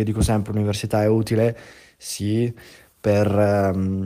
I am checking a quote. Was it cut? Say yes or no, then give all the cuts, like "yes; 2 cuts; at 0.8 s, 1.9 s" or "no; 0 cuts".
no; 0 cuts